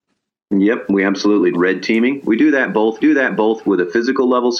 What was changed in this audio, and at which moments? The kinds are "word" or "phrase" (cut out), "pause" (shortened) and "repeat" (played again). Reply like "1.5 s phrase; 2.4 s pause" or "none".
1.5 s phrase; 3.0 s repeat